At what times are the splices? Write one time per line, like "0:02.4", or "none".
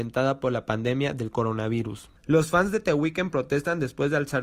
0:02.2

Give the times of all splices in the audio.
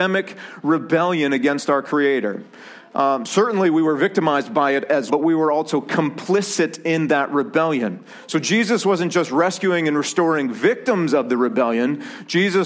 0:05.1

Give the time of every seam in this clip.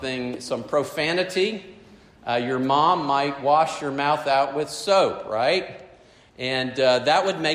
none

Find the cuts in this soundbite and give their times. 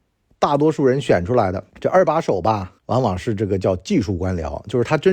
0:01.7
0:02.8

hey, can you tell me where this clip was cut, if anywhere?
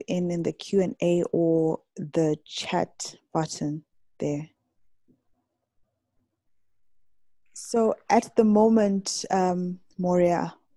none

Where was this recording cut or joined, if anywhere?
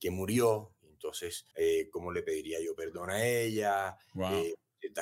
0:01.5

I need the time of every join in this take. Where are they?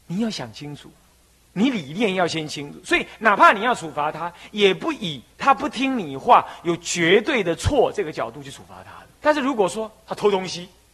0:01.1
0:09.1

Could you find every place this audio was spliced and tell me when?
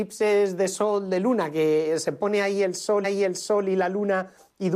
0:03.0

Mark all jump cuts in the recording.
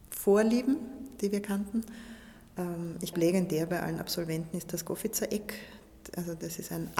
0:03.1

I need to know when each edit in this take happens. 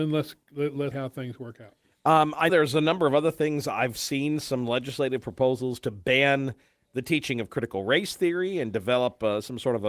0:00.9
0:02.5

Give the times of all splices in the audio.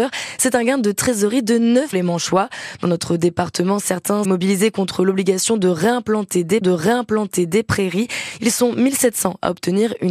0:01.9
0:04.2
0:06.6

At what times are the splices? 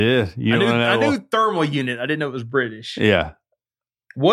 none

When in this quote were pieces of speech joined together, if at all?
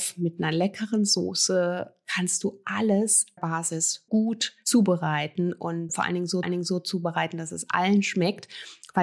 0:03.4
0:04.1
0:05.9
0:06.4

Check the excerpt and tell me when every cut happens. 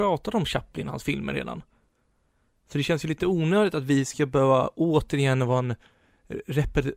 none

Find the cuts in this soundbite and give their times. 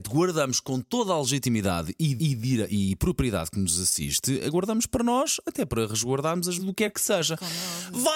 0:02.2
0:06.6

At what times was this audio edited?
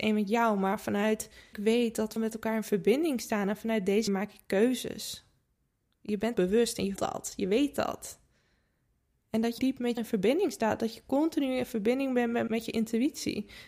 0:01.5
0:02.2
0:04.1
0:06.3
0:07.0
0:09.6
0:10.0
0:12.5

